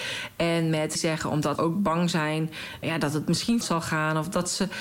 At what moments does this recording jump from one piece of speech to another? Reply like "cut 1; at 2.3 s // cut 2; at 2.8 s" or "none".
cut 1; at 1.0 s // cut 2; at 1.6 s // cut 3; at 2.8 s // cut 4; at 3.6 s